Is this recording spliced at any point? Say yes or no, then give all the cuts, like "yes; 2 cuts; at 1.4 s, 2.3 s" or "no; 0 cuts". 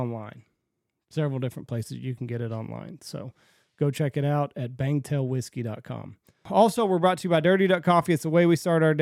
no; 0 cuts